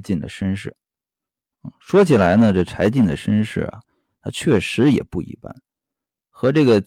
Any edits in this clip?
no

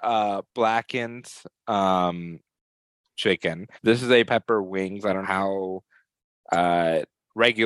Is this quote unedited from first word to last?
no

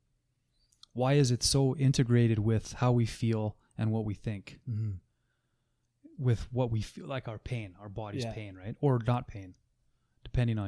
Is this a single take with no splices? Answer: yes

